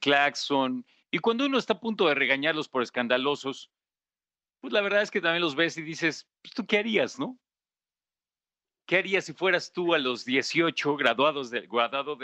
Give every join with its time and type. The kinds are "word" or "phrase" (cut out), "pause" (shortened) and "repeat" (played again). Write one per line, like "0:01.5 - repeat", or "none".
none